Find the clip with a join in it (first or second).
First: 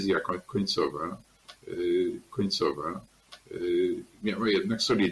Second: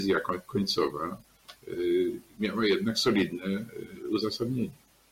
first